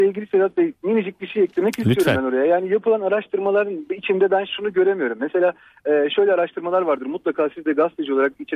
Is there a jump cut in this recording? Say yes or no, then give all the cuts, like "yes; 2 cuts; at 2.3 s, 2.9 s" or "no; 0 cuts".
no; 0 cuts